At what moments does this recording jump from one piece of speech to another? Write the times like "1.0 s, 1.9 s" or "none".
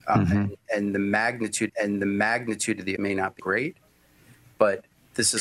1.7 s, 3.0 s, 3.4 s